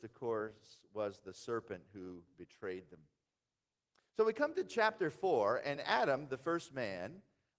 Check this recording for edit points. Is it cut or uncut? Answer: uncut